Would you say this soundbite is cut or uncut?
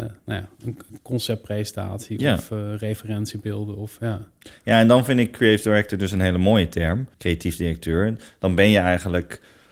cut